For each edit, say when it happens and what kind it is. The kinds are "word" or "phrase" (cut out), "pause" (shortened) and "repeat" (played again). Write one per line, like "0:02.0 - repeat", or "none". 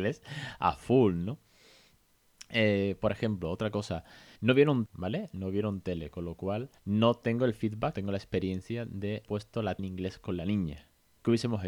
0:04.4 - pause
0:04.9 - word
0:06.8 - pause
0:07.9 - word
0:09.2 - word
0:09.8 - word